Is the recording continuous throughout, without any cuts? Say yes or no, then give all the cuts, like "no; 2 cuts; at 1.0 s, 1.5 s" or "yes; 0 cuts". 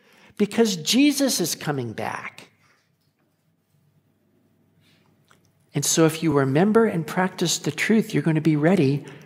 yes; 0 cuts